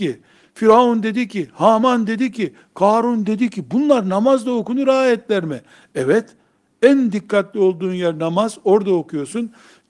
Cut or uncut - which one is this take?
uncut